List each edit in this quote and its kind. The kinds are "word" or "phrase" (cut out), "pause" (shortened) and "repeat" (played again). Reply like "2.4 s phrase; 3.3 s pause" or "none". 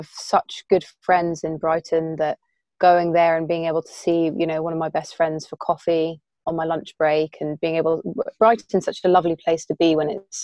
none